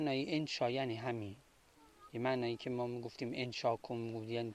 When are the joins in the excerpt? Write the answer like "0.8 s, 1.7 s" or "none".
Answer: none